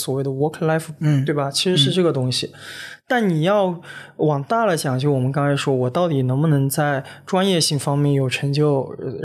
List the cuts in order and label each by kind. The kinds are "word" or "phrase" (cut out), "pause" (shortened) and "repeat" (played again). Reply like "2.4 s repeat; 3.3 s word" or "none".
1.0 s word